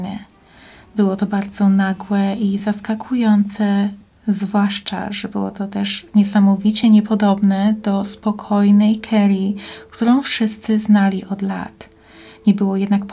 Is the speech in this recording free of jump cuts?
yes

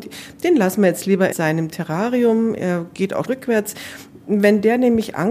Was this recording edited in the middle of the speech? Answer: yes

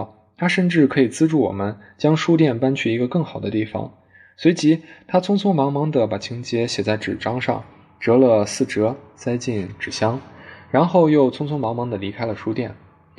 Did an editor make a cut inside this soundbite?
no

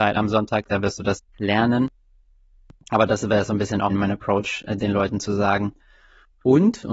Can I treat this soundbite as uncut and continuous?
no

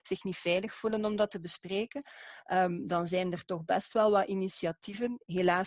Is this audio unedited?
yes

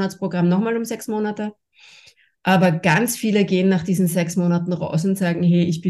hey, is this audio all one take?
yes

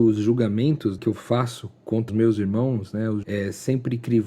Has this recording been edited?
yes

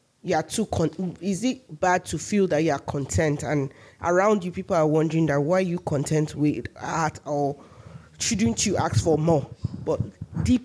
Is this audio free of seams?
yes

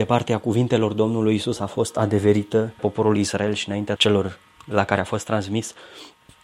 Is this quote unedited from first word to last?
no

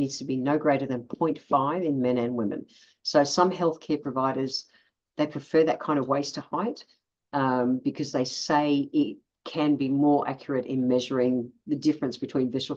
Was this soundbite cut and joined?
no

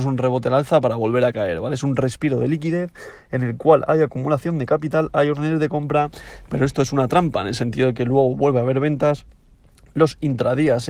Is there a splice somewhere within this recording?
no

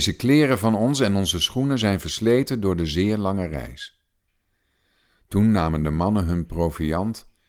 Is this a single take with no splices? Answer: yes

